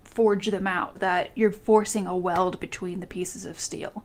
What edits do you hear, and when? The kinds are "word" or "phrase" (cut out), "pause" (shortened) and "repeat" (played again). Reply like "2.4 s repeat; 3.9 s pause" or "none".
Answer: 0.9 s word; 1.5 s word